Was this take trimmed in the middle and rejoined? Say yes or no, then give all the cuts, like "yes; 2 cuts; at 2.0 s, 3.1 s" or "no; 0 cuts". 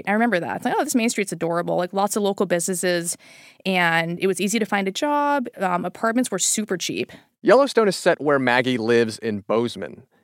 no; 0 cuts